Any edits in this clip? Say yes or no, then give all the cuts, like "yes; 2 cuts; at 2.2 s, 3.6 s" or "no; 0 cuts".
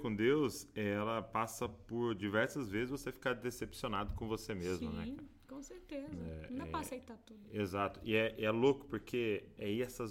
no; 0 cuts